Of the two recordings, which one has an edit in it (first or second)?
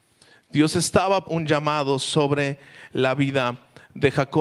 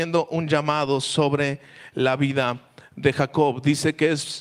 first